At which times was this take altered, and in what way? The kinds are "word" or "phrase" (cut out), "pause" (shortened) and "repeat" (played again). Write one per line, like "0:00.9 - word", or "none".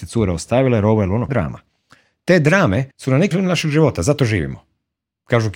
0:01.3 - word
0:02.9 - pause
0:03.3 - word